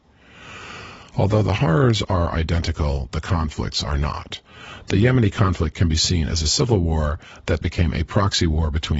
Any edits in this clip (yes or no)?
yes